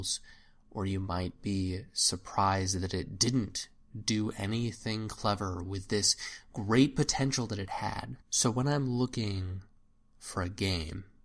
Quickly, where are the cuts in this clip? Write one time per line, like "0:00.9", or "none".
0:08.2